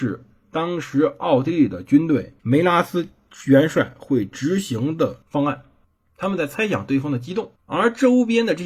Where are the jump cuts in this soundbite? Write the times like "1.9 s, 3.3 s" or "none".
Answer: 2.4 s, 5.2 s, 5.8 s, 7.6 s